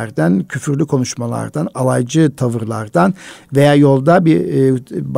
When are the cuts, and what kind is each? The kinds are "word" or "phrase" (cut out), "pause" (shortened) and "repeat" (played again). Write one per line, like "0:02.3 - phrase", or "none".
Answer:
none